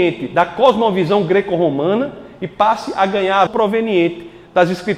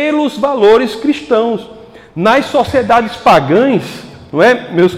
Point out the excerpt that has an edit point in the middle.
first; 1 cut; at 3.5 s

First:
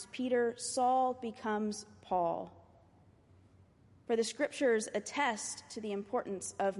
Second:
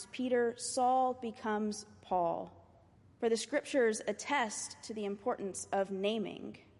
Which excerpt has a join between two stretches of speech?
second; 1 cut; at 2.9 s

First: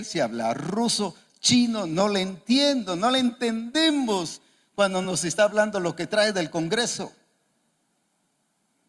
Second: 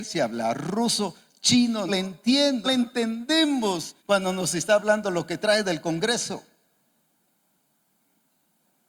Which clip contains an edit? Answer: second; 3 cuts; at 1.9 s, 2.6 s, 4.0 s

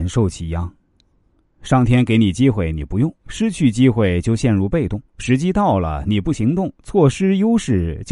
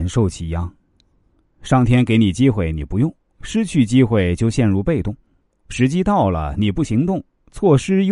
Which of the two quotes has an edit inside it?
first; 3 cuts; at 3.2 s, 5.1 s, 6.7 s

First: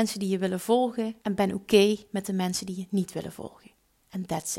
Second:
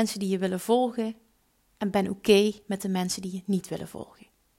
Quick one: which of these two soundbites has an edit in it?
first; 1 cut; at 1.2 s

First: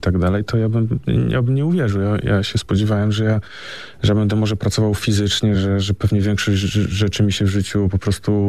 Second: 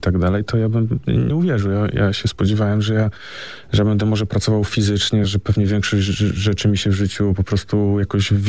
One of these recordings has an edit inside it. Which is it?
second; 2 cuts; at 1.3 s, 5.2 s

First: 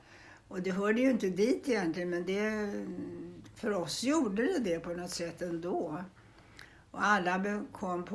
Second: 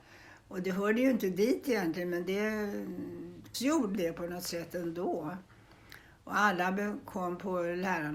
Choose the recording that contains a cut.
second; 2 cuts; at 3.5 s, 3.9 s

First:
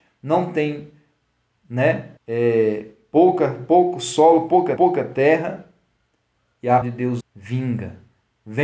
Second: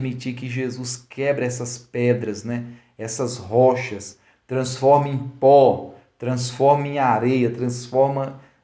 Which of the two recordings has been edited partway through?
first; 4 cuts; at 2.2 s, 4.8 s, 6.8 s, 7.2 s

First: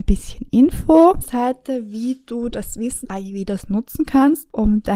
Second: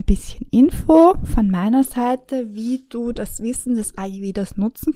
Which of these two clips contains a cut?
first; 2 cuts; at 1.2 s, 3.0 s

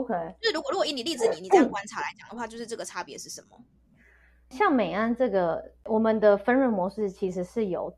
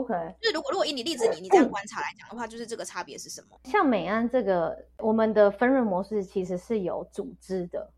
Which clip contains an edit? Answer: second; 1 cut; at 3.6 s

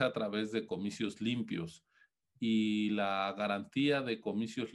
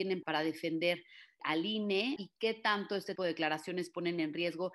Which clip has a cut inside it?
second; 1 cut; at 3.2 s

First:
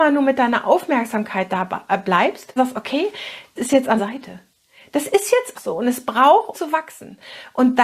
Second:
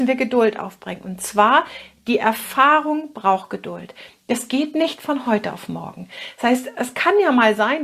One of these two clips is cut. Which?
first; 5 cuts; at 2.6 s, 3.6 s, 4.0 s, 5.5 s, 6.5 s

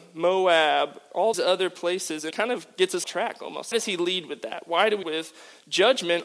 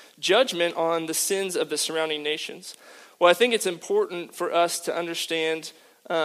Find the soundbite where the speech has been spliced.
first; 5 cuts; at 1.3 s, 2.3 s, 3.0 s, 3.7 s, 5.0 s

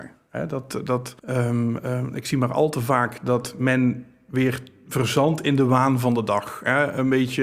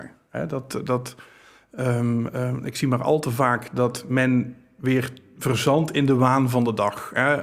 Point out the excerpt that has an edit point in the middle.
first; 1 cut; at 1.2 s

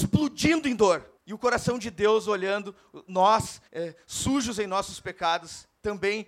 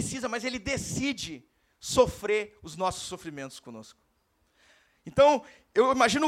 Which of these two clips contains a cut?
first; 2 cuts; at 1.2 s, 3.7 s

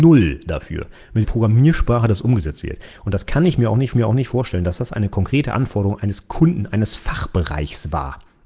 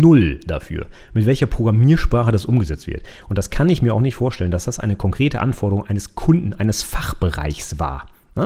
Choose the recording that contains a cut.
first; 2 cuts; at 1.2 s, 3.9 s

